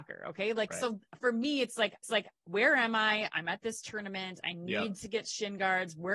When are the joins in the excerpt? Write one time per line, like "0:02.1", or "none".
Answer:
0:02.0